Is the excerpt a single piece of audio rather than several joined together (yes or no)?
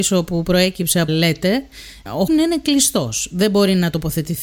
no